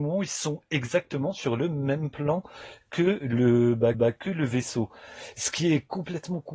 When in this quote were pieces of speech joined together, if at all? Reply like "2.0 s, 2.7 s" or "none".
3.9 s